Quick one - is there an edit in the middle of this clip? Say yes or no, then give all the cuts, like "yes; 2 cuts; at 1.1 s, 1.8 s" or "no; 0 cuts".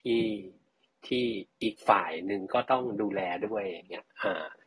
no; 0 cuts